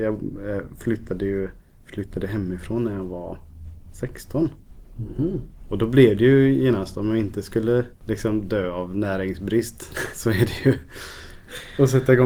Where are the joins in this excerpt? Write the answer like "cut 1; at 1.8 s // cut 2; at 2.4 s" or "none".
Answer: cut 1; at 1.6 s